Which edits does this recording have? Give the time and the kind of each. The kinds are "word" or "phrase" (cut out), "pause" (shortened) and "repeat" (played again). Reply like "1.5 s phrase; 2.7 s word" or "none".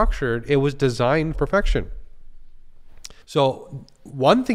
1.3 s word; 3.2 s pause